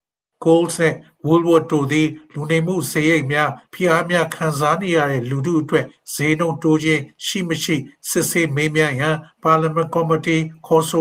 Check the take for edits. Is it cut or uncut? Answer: cut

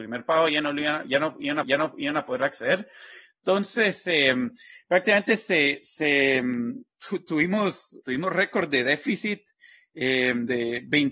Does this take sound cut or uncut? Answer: cut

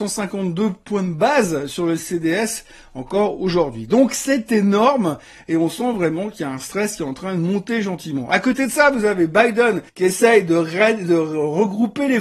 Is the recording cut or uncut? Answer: uncut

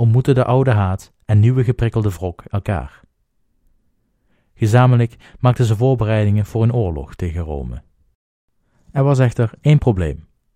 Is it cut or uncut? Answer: uncut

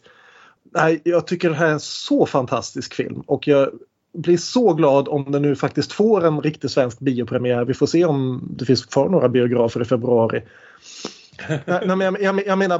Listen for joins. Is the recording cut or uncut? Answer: uncut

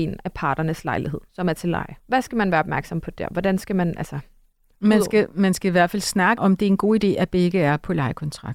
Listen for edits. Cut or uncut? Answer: cut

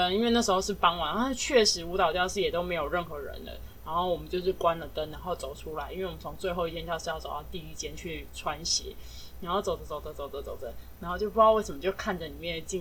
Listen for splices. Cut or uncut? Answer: uncut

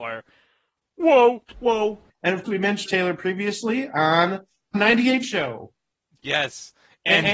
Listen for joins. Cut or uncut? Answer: cut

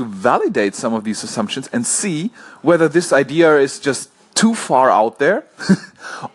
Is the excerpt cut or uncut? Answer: uncut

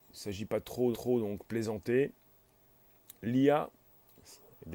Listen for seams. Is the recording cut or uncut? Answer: cut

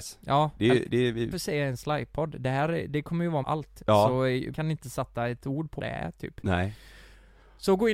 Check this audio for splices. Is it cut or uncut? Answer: cut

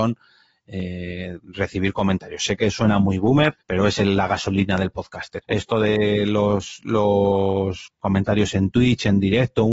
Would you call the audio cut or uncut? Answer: cut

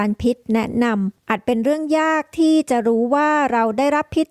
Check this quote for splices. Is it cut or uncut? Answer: cut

